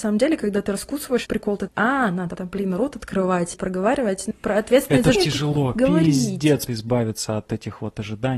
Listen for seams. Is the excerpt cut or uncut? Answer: cut